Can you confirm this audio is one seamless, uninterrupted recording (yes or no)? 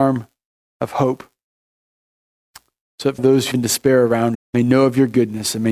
no